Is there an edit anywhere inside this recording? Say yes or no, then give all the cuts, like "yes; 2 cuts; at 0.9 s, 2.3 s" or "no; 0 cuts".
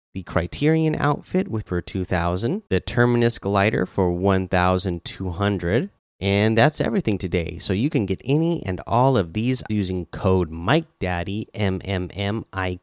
yes; 4 cuts; at 1.7 s, 2.7 s, 6.0 s, 9.7 s